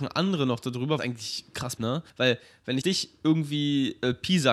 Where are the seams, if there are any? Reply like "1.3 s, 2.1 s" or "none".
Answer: 1.0 s, 1.8 s, 2.1 s, 2.8 s